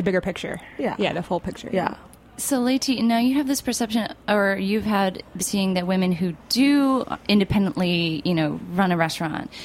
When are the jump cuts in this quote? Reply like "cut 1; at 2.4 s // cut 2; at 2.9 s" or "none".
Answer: cut 1; at 5.4 s